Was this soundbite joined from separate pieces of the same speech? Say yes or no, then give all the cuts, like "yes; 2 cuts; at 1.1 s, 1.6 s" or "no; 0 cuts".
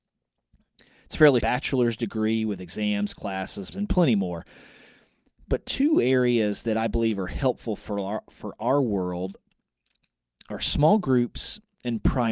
yes; 2 cuts; at 1.4 s, 3.7 s